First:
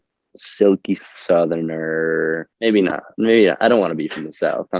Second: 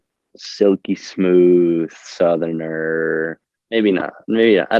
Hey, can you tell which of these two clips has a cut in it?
first; 2 cuts; at 1.0 s, 2.5 s

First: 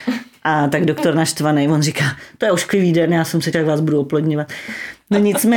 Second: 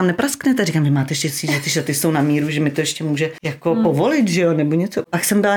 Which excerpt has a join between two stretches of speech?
first; 1 cut; at 3.5 s

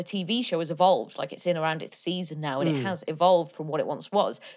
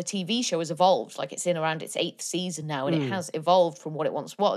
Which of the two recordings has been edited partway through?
first; 1 cut; at 1.9 s

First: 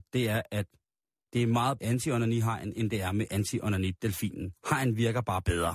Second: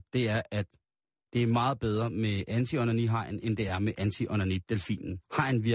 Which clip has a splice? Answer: first; 1 cut; at 1.8 s

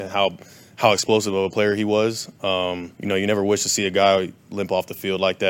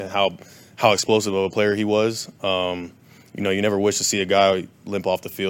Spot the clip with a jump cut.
first; 1 cut; at 2.9 s

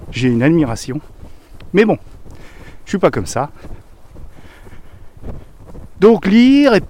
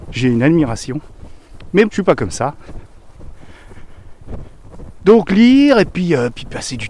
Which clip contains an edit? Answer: second; 1 cut; at 1.9 s

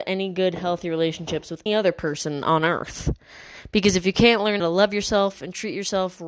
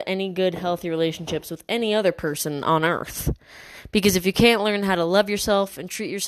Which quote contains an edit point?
first; 2 cuts; at 1.7 s, 4.6 s

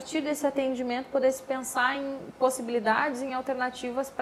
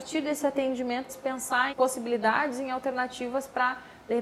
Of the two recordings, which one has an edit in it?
second; 2 cuts; at 1.1 s, 1.7 s

